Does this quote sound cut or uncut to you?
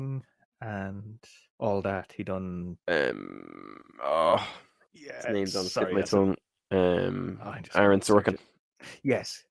uncut